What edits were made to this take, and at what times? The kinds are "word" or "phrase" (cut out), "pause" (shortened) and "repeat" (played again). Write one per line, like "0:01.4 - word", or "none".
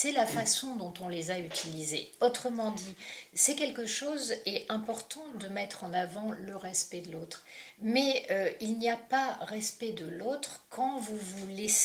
none